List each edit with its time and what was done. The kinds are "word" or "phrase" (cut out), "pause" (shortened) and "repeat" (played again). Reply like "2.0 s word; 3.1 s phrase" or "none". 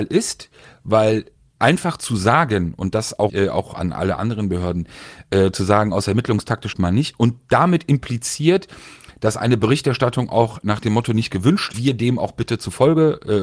3.3 s word; 6.7 s phrase; 11.7 s phrase